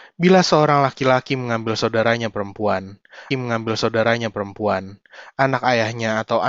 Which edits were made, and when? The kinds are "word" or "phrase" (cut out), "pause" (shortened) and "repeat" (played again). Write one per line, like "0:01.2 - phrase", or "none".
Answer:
0:03.3 - repeat